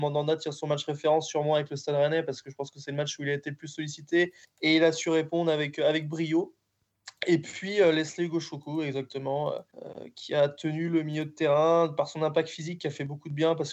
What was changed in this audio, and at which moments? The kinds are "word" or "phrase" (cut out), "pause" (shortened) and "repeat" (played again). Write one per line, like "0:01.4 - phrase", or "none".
0:04.4 - pause
0:09.7 - pause